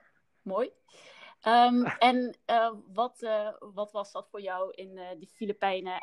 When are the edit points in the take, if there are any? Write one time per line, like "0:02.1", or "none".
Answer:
none